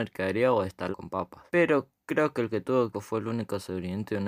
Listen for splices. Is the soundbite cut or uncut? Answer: cut